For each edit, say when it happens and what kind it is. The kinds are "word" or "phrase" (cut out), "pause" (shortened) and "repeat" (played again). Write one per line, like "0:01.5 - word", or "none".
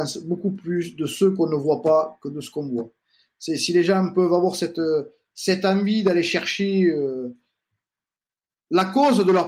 none